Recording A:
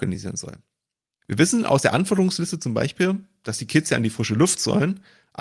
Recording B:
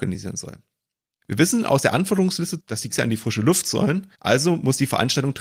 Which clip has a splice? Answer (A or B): B